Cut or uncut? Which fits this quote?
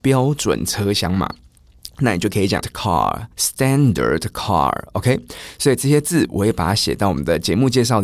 cut